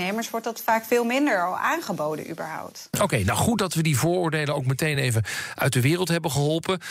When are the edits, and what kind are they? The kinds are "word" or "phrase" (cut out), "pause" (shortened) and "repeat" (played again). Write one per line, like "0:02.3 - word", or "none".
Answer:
none

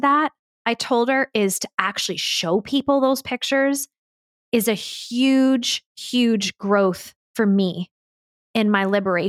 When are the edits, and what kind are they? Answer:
none

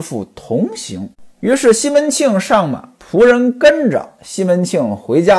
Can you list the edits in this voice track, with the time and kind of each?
0:01.1 - pause
0:02.9 - word

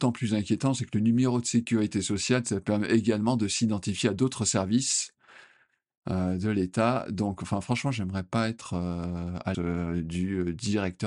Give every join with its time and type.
0:09.5 - phrase

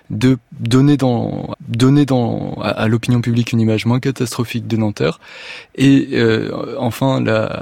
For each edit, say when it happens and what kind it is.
0:01.5 - repeat

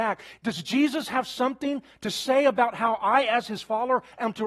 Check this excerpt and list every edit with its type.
none

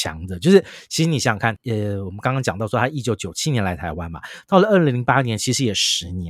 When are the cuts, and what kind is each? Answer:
0:01.6 - word

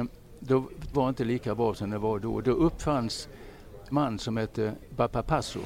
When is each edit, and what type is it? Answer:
0:00.9 - word
0:03.9 - word

